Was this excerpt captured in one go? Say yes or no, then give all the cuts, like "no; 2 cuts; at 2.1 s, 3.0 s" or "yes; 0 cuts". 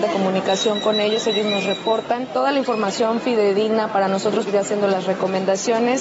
no; 1 cut; at 4.5 s